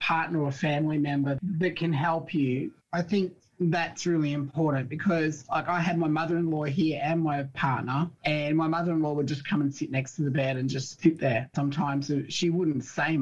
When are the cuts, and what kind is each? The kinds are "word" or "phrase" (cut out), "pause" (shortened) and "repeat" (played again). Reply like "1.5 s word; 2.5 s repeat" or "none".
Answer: none

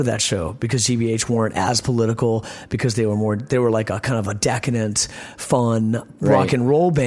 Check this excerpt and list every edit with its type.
none

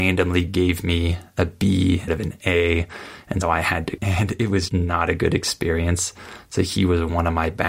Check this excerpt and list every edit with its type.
2.1 s word; 3.4 s word; 4.0 s word; 4.7 s word

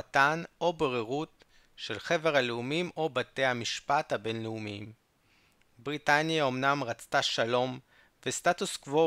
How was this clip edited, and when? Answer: none

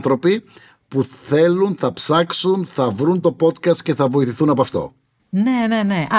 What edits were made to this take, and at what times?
none

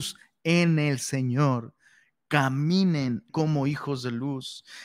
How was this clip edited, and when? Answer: 3.3 s word

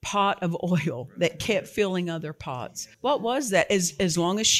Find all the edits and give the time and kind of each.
2.9 s pause

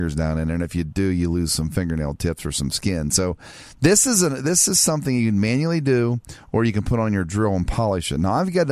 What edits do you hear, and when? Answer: none

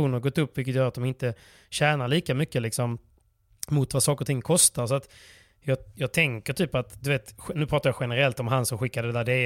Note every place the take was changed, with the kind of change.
none

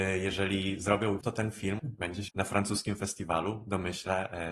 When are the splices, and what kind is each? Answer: 1.2 s word; 1.8 s word; 2.3 s word

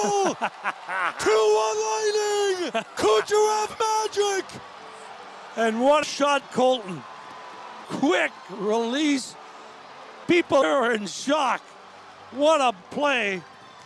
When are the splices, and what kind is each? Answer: 2.9 s word; 6.0 s word; 6.4 s word; 7.8 s word; 10.2 s word; 10.6 s word; 12.8 s word

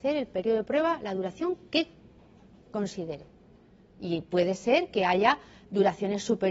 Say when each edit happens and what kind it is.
none

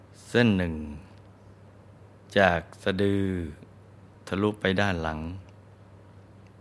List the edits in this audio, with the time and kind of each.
4.1 s pause

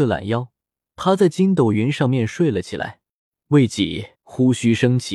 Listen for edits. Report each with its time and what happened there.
3.2 s pause; 4.1 s pause

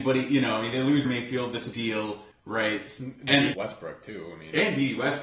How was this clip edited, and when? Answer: 1.0 s word; 1.7 s word; 3.5 s word

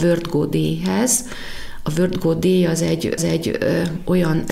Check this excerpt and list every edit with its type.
3.2 s repeat

